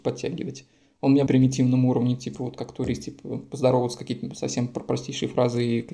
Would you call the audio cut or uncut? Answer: cut